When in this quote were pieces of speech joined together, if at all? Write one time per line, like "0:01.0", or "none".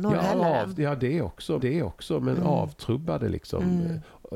0:01.6